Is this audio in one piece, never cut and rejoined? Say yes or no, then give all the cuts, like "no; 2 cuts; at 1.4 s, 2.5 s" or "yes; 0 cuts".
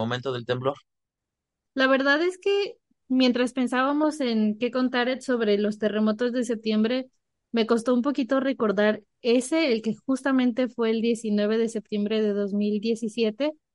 yes; 0 cuts